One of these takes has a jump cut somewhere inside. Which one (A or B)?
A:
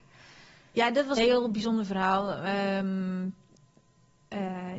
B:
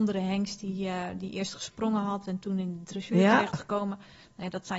A